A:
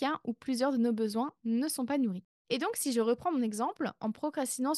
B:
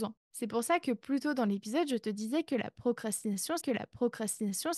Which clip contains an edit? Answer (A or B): B